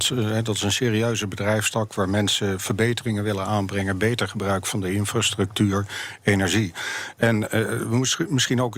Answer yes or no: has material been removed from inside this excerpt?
no